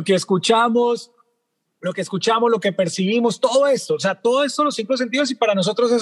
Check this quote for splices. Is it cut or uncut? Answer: uncut